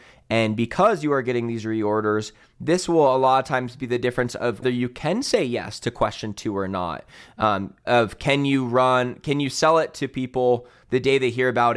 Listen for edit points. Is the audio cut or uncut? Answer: cut